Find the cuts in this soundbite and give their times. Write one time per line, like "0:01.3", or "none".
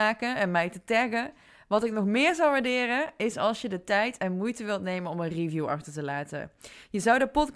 none